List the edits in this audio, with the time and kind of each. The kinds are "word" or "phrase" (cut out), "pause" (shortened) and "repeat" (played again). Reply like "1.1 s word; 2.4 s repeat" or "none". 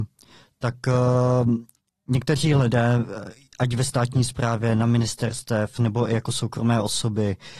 none